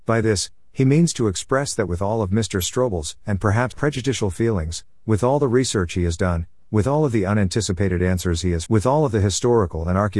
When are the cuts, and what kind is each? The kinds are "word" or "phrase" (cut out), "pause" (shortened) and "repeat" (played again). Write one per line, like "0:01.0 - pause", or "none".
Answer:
0:03.7 - word
0:08.7 - word